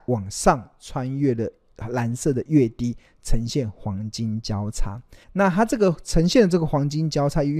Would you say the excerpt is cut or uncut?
cut